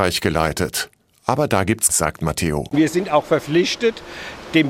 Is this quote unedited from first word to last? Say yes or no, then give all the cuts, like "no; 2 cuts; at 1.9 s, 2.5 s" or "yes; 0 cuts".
no; 1 cut; at 1.9 s